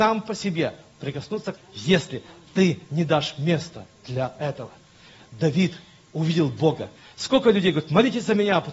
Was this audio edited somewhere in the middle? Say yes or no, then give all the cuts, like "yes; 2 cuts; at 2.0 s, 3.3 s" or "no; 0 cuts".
yes; 2 cuts; at 1.6 s, 7.0 s